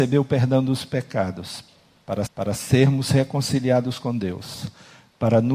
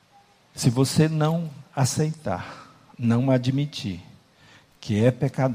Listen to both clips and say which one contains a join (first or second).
first